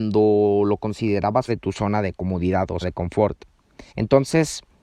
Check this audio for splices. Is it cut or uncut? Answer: cut